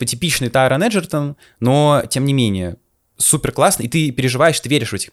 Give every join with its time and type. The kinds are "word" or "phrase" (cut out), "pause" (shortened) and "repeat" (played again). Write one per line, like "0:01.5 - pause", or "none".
none